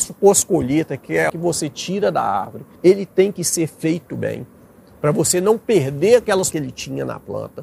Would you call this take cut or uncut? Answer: cut